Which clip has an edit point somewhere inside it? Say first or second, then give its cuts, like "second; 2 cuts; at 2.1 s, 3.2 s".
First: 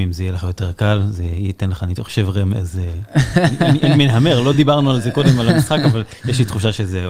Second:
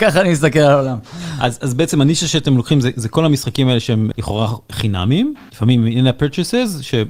second; 2 cuts; at 4.1 s, 5.5 s